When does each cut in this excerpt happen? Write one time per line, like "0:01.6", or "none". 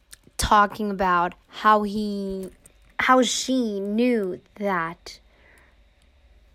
0:01.4
0:02.7